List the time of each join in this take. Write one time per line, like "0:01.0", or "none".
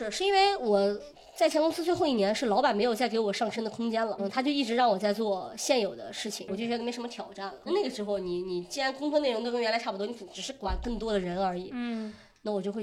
0:04.2
0:06.5
0:07.7